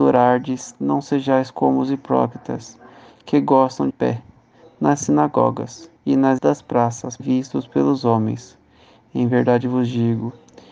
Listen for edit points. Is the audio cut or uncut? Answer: cut